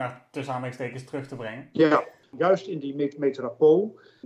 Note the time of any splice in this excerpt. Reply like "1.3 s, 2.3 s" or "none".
none